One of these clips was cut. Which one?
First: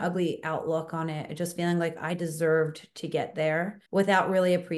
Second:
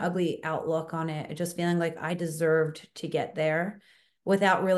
first; 1 cut; at 3.9 s

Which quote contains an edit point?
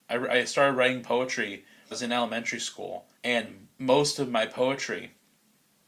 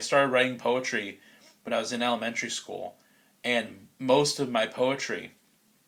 first; 2 cuts; at 1.9 s, 3.2 s

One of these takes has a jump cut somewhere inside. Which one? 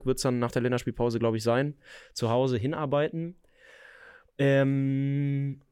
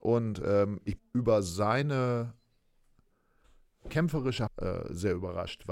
second; 3 cuts; at 1.0 s, 3.9 s, 4.5 s

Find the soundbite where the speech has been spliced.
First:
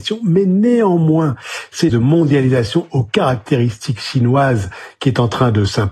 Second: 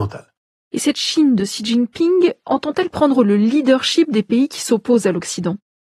first; 1 cut; at 1.9 s

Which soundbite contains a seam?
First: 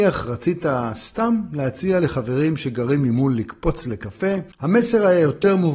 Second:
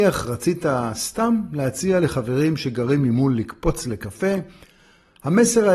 first; 1 cut; at 4.5 s

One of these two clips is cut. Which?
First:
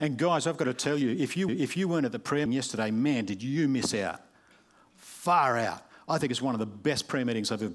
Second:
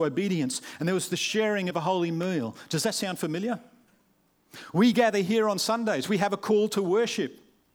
first; 2 cuts; at 1.5 s, 2.5 s

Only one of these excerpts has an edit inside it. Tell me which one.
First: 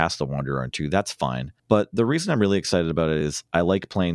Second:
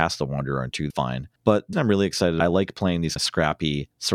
second; 4 cuts; at 0.9 s, 1.7 s, 2.4 s, 3.2 s

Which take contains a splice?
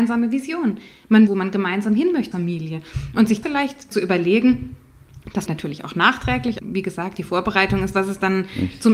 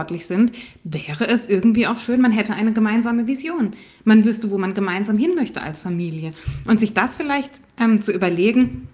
first; 7 cuts; at 1.3 s, 2.3 s, 3.4 s, 3.9 s, 5.5 s, 6.6 s, 7.9 s

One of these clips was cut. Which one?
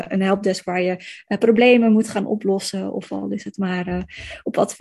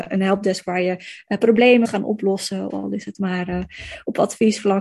second; 2 cuts; at 1.8 s, 2.7 s

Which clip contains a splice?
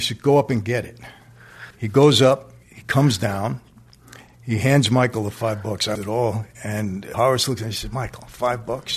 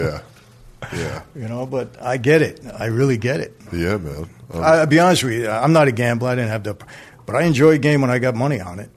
first; 3 cuts; at 1.7 s, 5.9 s, 7.1 s

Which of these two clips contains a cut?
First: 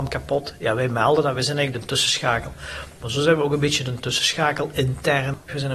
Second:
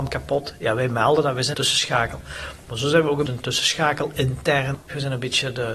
second; 2 cuts; at 1.5 s, 3.3 s

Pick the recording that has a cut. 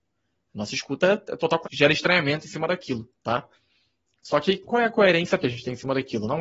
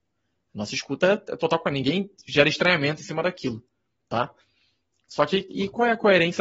first; 4 cuts; at 1.6 s, 3.1 s, 4.6 s, 5.4 s

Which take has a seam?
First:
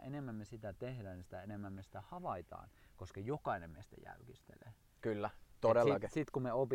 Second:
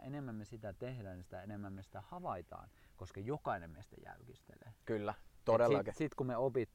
second; 1 cut; at 4.8 s

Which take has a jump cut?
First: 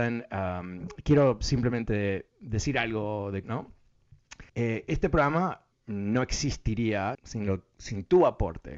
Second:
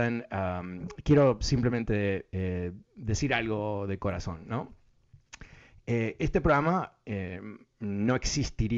first; 5 cuts; at 2.3 s, 3.4 s, 4.5 s, 5.7 s, 7.1 s

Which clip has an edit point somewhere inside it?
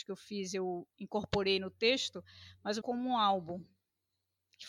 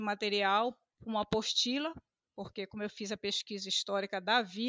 first; 2 cuts; at 0.9 s, 2.8 s

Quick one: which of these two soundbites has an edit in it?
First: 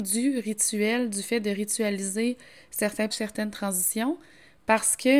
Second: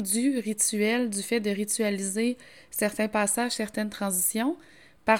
first; 1 cut; at 3.1 s

